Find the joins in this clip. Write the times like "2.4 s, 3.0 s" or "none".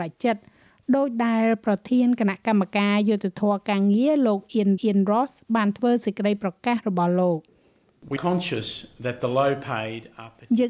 4.8 s, 8.2 s